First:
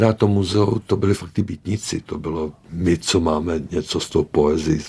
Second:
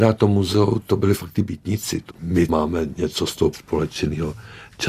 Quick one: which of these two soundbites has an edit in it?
second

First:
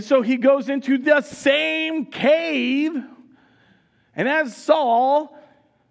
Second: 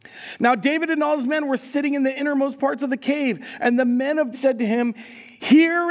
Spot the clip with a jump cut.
second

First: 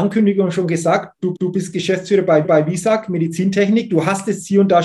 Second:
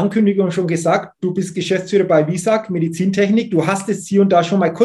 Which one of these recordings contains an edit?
first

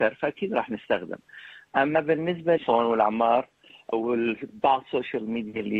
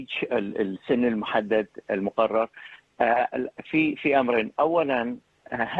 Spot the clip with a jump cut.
first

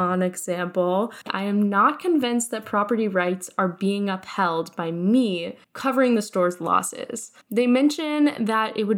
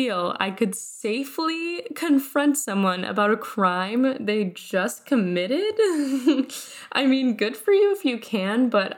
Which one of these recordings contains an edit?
first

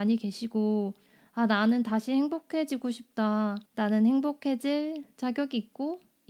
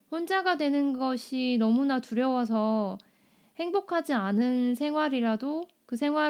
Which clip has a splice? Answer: first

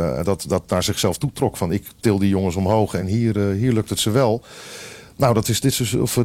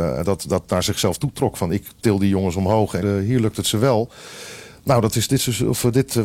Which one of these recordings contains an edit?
second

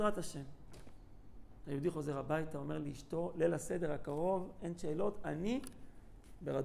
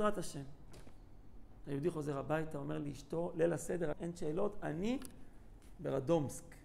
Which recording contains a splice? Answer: second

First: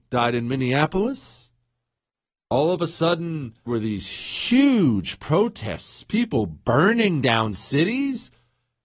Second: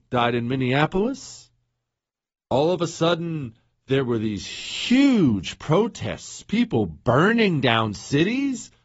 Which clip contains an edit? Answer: first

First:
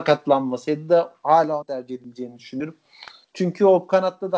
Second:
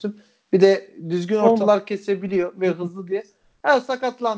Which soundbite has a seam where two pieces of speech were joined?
first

